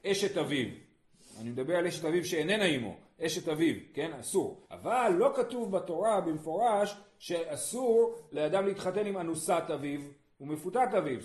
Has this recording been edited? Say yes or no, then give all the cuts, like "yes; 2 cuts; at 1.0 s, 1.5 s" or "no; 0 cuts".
yes; 1 cut; at 4.6 s